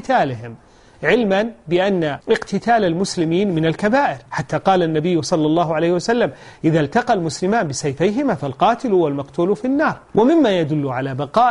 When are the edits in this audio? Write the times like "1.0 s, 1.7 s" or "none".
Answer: 2.2 s, 4.3 s, 10.0 s